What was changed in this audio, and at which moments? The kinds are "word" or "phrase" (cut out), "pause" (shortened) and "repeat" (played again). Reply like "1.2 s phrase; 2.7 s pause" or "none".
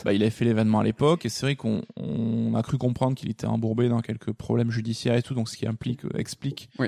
none